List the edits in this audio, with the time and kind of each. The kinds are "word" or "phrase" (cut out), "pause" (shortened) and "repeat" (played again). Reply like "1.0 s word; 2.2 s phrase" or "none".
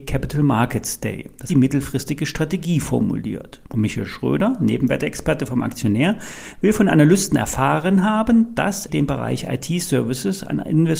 1.5 s phrase; 3.7 s pause; 8.9 s word